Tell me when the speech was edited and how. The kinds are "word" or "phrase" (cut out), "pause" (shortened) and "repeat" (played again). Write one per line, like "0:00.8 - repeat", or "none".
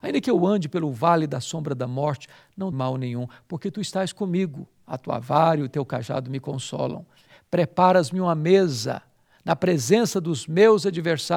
0:02.7 - word